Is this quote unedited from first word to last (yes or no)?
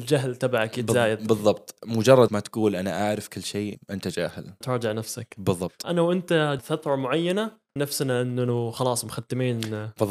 no